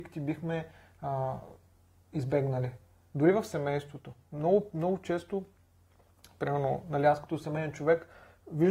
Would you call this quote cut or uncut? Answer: uncut